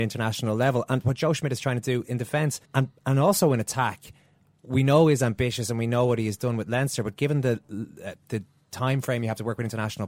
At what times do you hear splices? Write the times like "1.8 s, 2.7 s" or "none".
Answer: 2.6 s